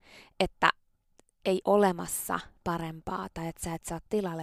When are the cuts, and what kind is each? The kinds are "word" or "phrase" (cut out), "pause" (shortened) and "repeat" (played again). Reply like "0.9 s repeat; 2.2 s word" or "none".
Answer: 1.6 s word